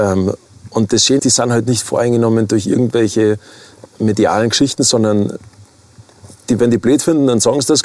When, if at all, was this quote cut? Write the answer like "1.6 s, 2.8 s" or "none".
1.2 s, 3.9 s

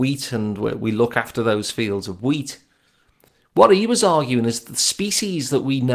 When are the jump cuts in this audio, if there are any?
none

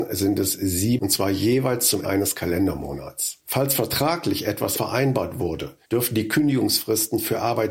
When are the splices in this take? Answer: 1.0 s, 2.0 s, 3.4 s, 4.8 s, 5.8 s

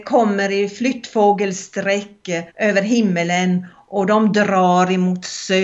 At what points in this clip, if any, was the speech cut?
2.5 s

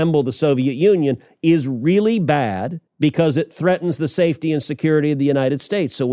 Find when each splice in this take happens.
2.9 s

